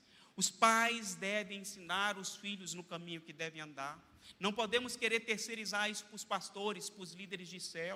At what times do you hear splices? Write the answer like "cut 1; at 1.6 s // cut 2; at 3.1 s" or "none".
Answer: none